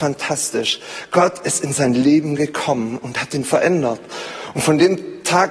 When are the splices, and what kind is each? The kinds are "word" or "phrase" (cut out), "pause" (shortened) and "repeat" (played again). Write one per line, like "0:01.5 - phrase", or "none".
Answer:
none